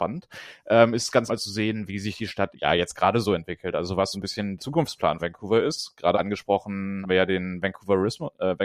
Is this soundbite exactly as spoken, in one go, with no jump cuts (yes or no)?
no